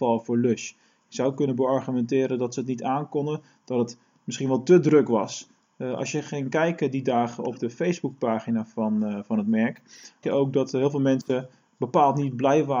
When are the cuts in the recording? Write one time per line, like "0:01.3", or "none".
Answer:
0:10.2